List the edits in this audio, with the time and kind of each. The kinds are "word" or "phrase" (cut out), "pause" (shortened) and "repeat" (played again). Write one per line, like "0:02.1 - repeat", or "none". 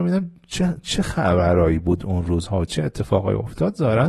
none